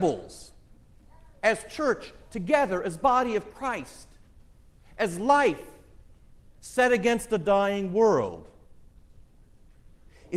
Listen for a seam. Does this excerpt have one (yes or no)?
no